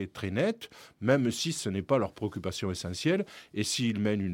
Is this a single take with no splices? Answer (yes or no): yes